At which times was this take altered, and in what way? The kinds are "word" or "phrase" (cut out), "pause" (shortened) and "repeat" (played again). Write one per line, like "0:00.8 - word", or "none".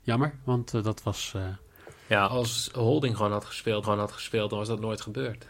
0:02.3 - word
0:03.8 - repeat